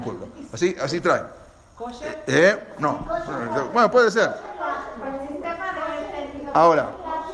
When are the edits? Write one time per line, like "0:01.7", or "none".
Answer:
none